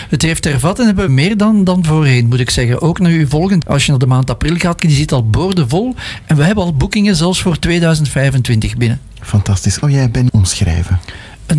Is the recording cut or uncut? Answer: cut